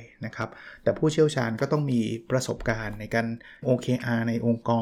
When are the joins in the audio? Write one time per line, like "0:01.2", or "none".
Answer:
0:03.6